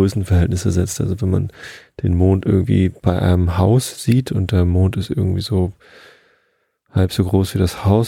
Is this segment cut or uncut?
uncut